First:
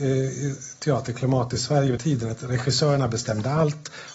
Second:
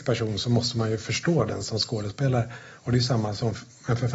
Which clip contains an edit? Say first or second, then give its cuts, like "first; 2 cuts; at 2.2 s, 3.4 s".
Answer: first; 1 cut; at 2.0 s